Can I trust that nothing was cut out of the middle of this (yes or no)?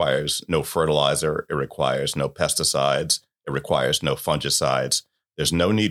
yes